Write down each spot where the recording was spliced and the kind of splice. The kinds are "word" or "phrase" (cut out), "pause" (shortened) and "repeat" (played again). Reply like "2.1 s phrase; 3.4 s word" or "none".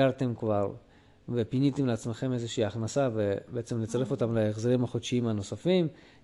none